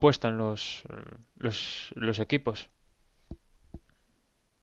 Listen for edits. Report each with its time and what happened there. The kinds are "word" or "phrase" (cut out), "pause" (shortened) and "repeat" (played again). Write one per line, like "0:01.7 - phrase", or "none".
none